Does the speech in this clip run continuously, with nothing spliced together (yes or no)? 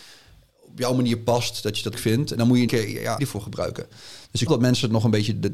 no